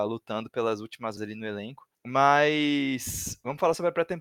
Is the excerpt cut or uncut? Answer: cut